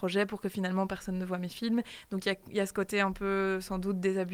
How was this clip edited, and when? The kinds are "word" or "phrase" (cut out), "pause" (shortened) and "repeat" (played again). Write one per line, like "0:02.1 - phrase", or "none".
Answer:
none